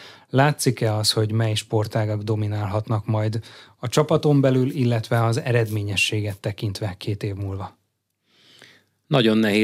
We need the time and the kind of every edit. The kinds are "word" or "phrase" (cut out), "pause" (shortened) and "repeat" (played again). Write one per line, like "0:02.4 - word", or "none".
none